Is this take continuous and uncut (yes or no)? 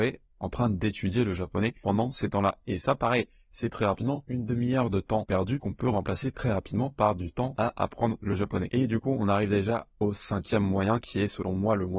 yes